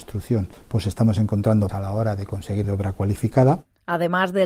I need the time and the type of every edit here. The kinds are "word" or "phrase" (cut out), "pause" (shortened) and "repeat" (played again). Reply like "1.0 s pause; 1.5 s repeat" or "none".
1.7 s word; 2.6 s word

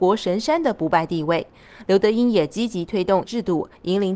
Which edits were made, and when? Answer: 3.2 s word

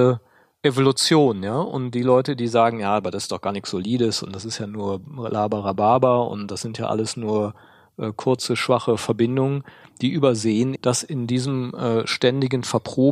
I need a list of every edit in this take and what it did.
10.8 s word

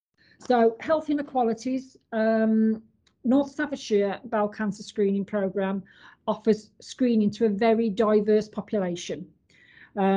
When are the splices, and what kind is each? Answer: none

